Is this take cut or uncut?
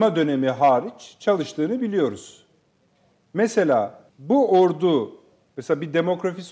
cut